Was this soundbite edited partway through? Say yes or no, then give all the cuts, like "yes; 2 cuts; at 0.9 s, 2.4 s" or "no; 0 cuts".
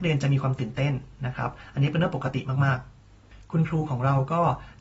yes; 1 cut; at 3.0 s